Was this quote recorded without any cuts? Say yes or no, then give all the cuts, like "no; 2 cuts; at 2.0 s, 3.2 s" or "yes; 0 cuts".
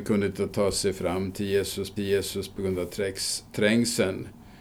no; 1 cut; at 2.0 s